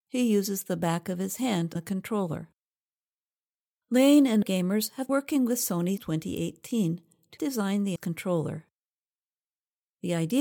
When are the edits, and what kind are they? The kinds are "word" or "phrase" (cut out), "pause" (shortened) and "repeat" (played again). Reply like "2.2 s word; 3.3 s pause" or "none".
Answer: 1.8 s word; 4.4 s word; 5.1 s word; 6.0 s word; 7.4 s word; 8.0 s word